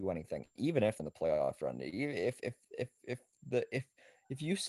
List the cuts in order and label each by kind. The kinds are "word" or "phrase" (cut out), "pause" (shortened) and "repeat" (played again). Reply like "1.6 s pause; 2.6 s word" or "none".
1.0 s word; 2.4 s word